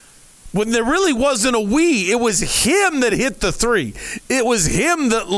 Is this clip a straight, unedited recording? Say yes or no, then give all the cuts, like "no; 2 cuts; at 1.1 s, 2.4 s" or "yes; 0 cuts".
yes; 0 cuts